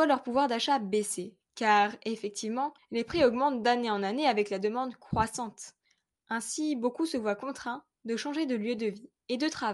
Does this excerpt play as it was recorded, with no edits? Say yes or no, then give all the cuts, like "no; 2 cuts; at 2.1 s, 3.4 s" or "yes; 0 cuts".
yes; 0 cuts